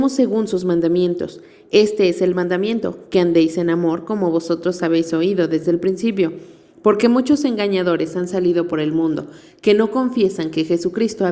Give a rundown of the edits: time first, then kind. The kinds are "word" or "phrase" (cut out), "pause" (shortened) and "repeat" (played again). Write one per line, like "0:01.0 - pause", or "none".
none